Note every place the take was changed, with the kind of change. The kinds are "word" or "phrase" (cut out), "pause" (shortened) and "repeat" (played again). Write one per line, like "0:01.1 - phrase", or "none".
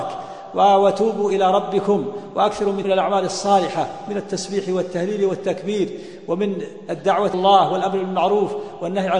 0:02.8 - phrase
0:07.3 - word